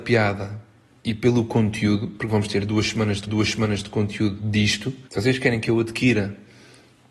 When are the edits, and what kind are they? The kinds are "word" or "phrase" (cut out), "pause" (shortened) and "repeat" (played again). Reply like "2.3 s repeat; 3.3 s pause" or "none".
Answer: 3.3 s repeat; 5.1 s pause